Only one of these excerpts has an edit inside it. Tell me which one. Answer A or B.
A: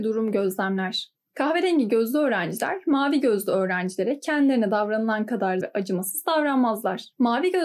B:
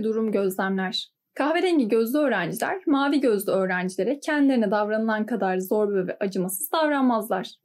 A